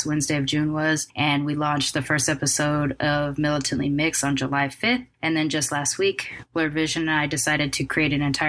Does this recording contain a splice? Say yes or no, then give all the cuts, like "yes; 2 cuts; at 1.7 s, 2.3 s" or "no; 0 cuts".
no; 0 cuts